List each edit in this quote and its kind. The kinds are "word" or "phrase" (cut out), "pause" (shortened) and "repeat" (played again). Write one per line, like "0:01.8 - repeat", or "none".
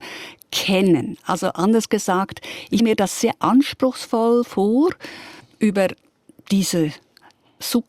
0:02.8 - word
0:05.4 - pause